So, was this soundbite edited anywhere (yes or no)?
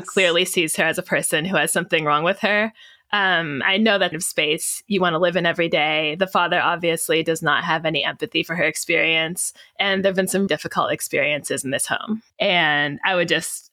yes